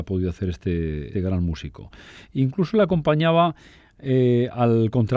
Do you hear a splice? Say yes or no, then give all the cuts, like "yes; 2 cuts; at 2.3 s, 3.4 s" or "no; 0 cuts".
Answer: yes; 1 cut; at 1.1 s